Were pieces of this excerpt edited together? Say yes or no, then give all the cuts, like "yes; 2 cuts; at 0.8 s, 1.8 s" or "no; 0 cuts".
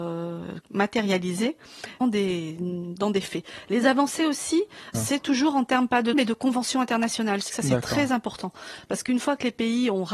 yes; 4 cuts; at 2.0 s, 4.9 s, 6.1 s, 7.5 s